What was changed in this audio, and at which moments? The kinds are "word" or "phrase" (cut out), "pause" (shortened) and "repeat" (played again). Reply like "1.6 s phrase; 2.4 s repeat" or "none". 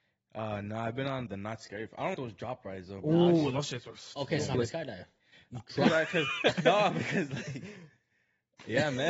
1.3 s word; 2.1 s word; 4.5 s word

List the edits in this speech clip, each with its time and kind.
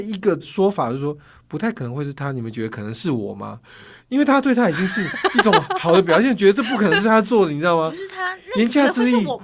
none

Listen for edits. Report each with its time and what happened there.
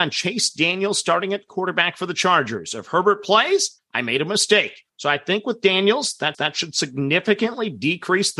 3.8 s word; 4.9 s pause; 6.3 s repeat

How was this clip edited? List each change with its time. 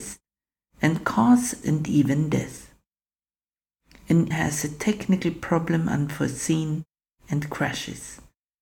1.6 s word; 4.3 s word

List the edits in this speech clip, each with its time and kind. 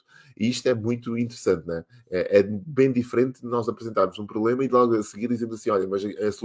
none

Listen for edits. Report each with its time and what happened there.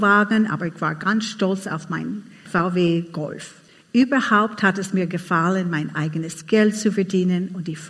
2.5 s word; 3.7 s pause

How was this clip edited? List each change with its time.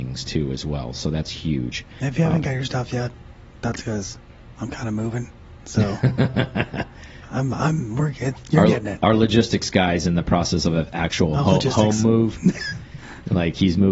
none

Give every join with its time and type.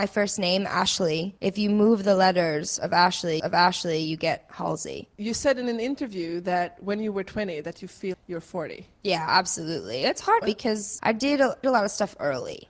1.4 s pause; 3.4 s repeat; 5.1 s pause; 8.1 s word; 10.4 s word; 11.0 s word; 11.6 s phrase

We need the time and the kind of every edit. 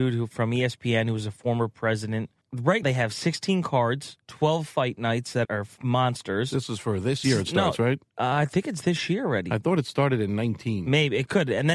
2.8 s word; 4.2 s pause; 5.4 s word; 7.2 s phrase

